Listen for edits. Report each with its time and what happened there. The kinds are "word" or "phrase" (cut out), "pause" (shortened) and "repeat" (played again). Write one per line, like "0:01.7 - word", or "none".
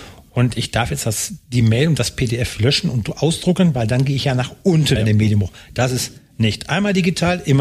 0:05.0 - word